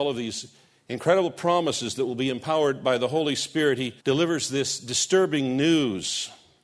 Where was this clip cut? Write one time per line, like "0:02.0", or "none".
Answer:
0:04.0